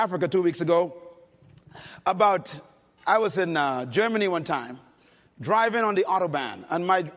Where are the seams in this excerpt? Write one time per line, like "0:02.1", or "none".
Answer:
none